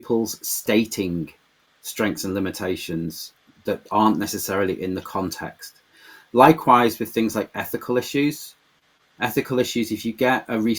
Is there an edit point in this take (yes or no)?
no